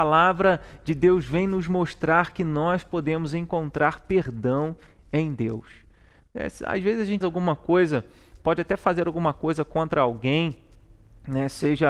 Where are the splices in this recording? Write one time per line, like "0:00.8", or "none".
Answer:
0:07.2